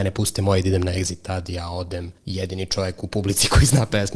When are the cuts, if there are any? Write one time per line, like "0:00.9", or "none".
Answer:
0:02.2